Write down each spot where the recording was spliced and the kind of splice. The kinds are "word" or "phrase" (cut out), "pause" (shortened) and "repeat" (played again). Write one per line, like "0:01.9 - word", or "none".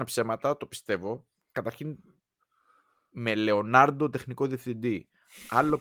none